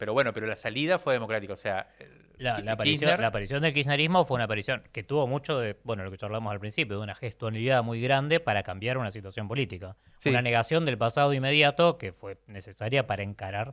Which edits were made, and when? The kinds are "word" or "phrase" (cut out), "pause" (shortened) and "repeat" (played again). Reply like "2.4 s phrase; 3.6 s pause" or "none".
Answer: none